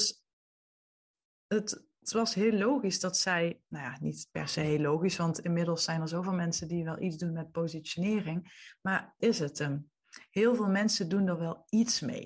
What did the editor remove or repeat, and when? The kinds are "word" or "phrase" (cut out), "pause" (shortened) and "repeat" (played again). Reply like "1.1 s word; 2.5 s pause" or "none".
9.2 s word